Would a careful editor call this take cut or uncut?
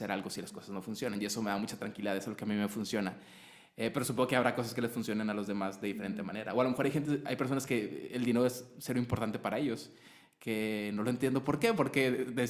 uncut